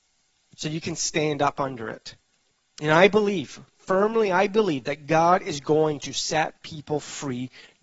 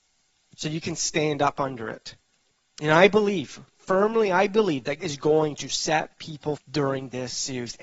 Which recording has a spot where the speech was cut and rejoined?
second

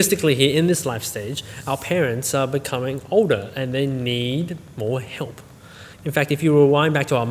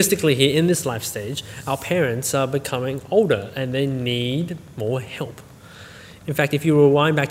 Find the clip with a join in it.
first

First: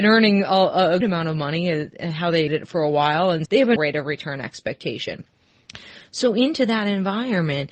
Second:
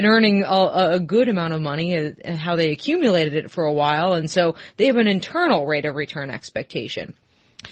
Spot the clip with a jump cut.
first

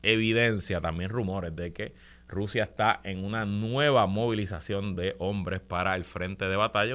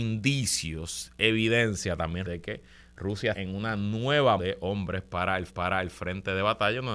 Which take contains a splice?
second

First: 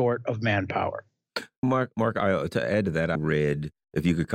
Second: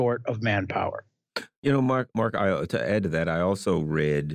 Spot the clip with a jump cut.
first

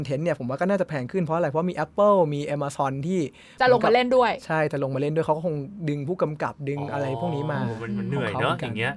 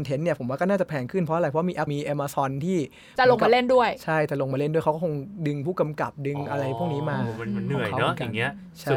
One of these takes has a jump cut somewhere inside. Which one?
second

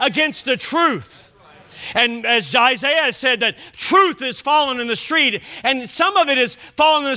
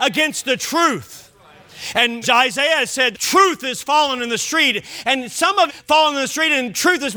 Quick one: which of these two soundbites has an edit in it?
second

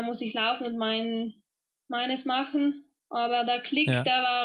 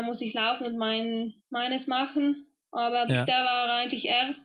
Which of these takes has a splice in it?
second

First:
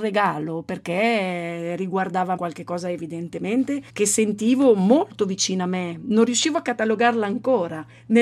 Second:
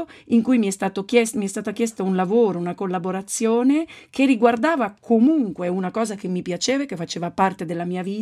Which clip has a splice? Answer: first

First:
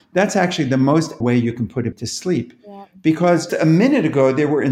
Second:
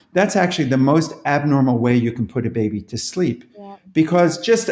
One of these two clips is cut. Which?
first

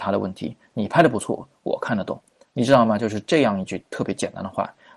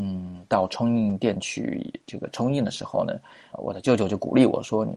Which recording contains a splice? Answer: second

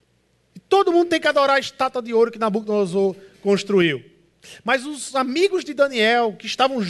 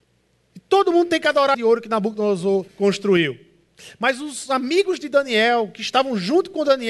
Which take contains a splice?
second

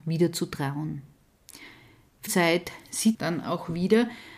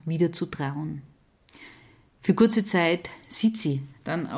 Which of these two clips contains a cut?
first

